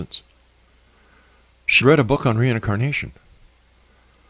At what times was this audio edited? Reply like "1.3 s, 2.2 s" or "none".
1.8 s